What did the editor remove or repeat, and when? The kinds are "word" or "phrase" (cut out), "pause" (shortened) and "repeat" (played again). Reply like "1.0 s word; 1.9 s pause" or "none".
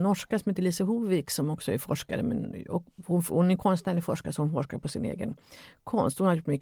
none